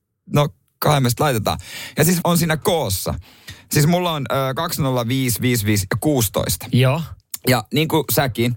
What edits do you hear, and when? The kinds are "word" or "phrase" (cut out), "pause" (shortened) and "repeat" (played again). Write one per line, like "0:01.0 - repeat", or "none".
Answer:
0:02.2 - word